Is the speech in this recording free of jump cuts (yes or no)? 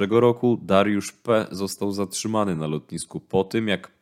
yes